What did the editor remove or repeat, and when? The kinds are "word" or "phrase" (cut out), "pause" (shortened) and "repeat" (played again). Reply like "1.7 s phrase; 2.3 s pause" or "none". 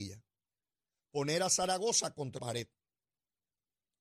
2.4 s word